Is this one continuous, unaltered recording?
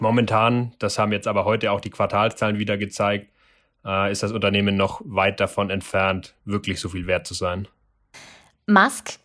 yes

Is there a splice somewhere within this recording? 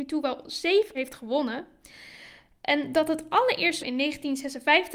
yes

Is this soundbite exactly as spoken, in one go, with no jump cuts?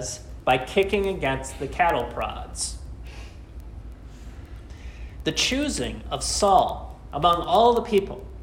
yes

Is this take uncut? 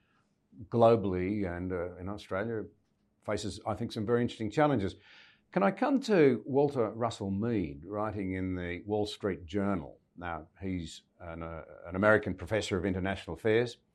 yes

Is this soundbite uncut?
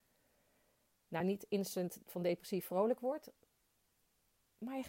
yes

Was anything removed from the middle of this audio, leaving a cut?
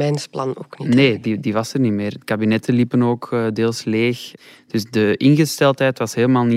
no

